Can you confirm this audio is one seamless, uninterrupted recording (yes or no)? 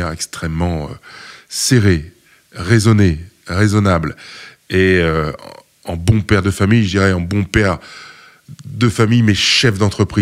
yes